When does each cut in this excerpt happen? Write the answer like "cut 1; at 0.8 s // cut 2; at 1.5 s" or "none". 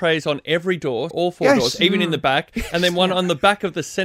cut 1; at 1.1 s

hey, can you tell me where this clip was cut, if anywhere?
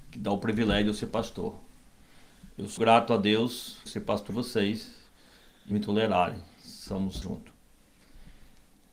cut 1; at 2.8 s // cut 2; at 3.9 s // cut 3; at 4.3 s // cut 4; at 5.7 s // cut 5; at 7.2 s

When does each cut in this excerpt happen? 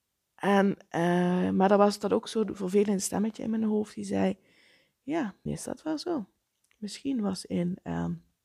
cut 1; at 5.5 s

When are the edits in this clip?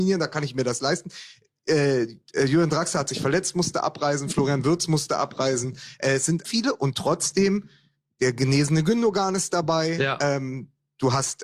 cut 1; at 6.4 s

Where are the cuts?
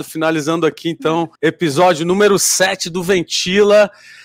cut 1; at 1.4 s

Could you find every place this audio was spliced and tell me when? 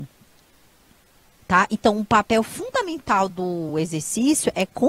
none

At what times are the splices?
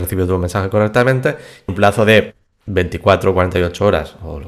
cut 1; at 1.7 s

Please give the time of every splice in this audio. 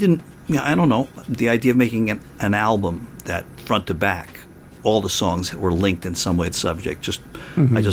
cut 1; at 2.3 s // cut 2; at 4.8 s // cut 3; at 6.5 s

